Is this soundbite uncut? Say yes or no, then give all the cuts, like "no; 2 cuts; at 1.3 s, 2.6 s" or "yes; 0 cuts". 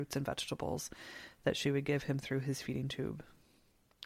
yes; 0 cuts